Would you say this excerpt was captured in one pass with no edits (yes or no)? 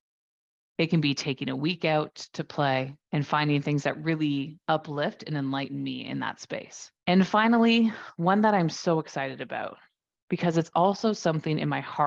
no